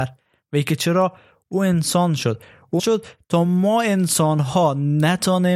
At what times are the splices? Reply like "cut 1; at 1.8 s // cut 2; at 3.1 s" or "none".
cut 1; at 2.8 s